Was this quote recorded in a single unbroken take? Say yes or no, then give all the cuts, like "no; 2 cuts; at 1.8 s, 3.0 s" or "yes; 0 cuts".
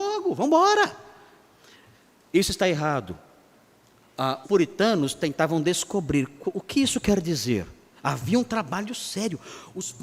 no; 1 cut; at 4.4 s